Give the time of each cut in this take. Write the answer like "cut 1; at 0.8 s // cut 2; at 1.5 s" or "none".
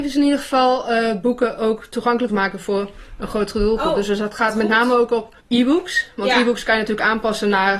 cut 1; at 2.3 s // cut 2; at 5.4 s